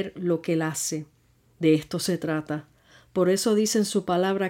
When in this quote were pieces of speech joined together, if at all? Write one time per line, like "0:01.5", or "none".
none